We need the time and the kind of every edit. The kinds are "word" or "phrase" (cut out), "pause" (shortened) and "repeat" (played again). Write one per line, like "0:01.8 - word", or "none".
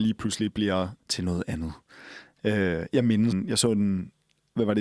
0:01.0 - word
0:03.3 - word